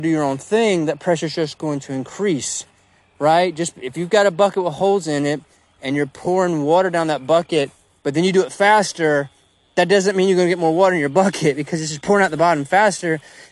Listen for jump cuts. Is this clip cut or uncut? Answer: uncut